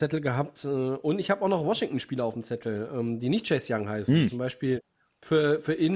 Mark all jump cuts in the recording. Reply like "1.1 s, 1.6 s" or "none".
none